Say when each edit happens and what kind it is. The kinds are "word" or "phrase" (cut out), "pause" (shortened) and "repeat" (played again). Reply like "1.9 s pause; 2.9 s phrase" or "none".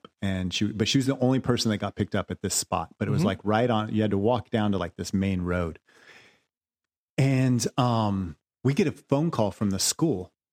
none